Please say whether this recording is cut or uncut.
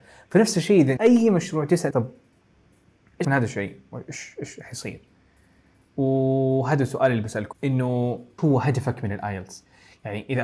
cut